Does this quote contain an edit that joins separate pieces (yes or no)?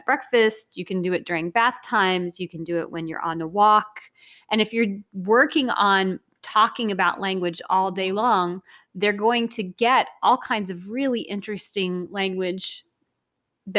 no